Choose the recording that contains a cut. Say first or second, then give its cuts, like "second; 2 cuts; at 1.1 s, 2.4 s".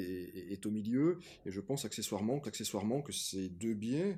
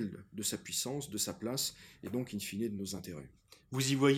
first; 1 cut; at 2.4 s